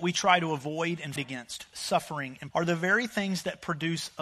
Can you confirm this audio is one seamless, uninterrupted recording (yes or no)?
no